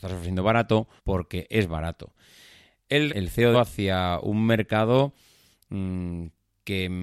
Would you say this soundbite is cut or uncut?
cut